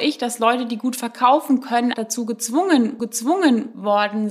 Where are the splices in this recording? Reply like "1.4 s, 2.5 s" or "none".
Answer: 1.9 s, 3.0 s